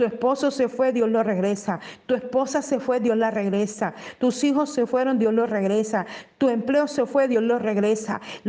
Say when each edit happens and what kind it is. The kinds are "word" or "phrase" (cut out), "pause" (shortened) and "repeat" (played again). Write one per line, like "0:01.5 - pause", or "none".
none